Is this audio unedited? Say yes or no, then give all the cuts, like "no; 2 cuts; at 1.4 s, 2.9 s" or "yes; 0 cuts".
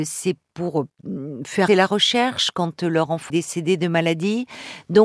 no; 2 cuts; at 1.7 s, 3.3 s